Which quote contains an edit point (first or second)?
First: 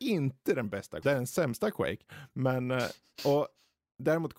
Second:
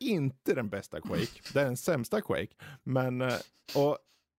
first